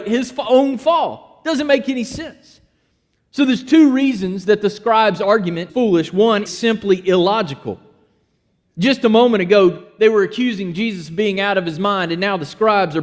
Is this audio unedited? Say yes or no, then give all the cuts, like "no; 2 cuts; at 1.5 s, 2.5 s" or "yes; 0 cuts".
no; 2 cuts; at 5.7 s, 6.5 s